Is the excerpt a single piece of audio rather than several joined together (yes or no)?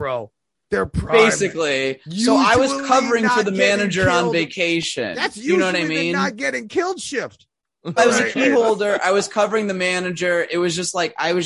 no